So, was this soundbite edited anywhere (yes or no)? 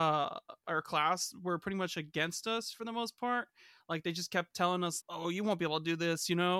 yes